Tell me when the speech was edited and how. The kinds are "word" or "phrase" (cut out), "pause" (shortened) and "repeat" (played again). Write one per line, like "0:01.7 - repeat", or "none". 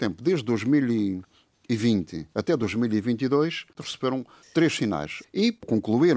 0:02.3 - pause